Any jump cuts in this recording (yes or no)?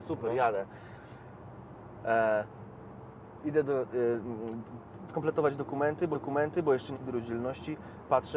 yes